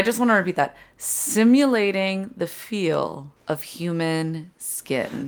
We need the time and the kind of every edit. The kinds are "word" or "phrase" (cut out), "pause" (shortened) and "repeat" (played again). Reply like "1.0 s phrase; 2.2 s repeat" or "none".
3.4 s pause

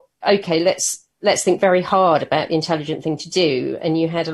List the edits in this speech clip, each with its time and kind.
none

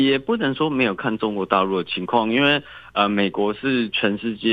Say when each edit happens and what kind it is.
none

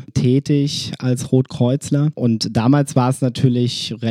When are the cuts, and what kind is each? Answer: none

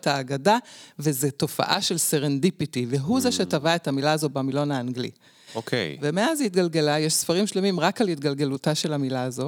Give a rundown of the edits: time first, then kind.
none

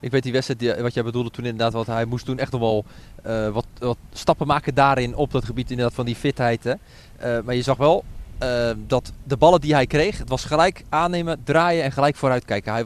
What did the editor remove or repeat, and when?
none

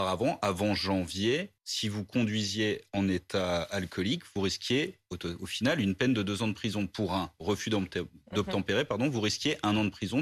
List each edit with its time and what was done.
1.6 s pause

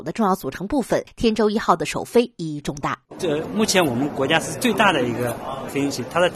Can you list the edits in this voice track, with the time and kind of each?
3.0 s pause

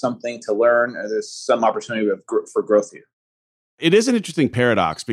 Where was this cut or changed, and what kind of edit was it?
3.4 s pause

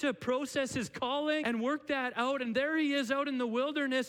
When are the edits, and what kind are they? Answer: 1.4 s word

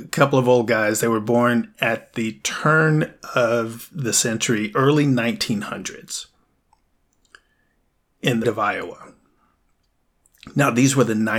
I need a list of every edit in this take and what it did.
8.4 s word

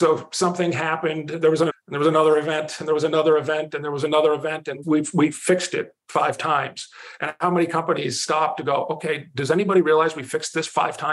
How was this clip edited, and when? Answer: 1.7 s word; 4.8 s word

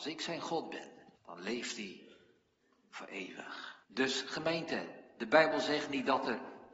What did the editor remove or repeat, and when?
1.1 s pause; 3.8 s pause

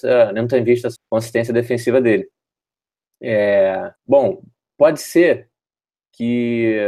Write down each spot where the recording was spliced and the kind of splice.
1.0 s word; 4.0 s pause

